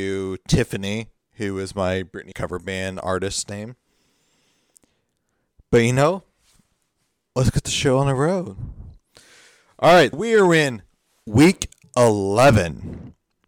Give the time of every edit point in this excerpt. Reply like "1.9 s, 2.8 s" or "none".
2.3 s, 10.1 s